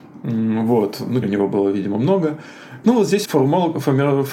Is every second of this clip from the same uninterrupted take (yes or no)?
no